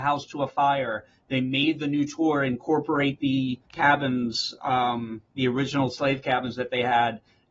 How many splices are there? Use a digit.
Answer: 1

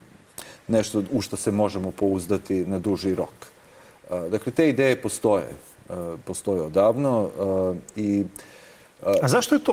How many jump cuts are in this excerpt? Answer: 0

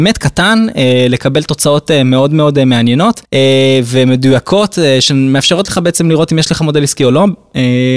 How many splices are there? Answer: 1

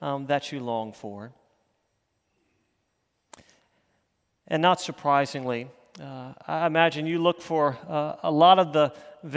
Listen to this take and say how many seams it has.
0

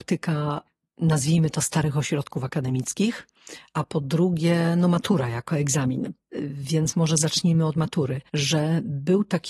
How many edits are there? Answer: 1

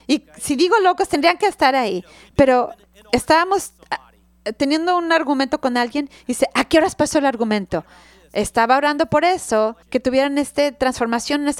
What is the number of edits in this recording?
1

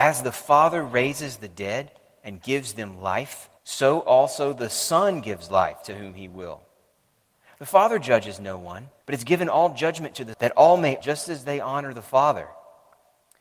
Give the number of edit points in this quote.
4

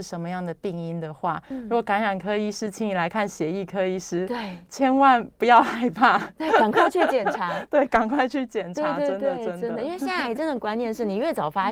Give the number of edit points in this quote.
0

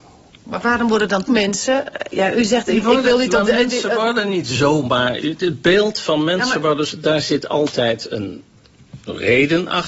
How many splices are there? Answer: 1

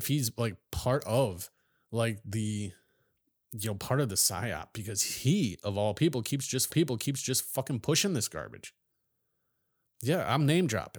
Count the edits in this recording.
1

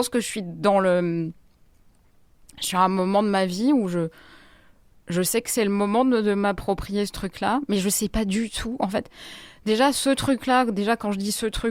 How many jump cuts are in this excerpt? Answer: 0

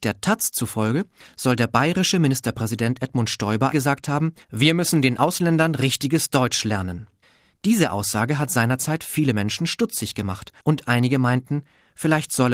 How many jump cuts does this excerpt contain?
4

